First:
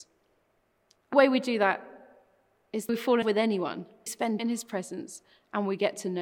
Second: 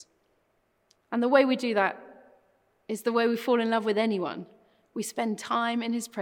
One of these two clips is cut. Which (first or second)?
first